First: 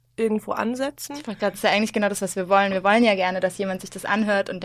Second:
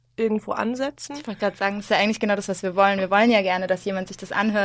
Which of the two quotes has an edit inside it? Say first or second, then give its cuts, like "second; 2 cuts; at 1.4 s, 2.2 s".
first; 1 cut; at 1.5 s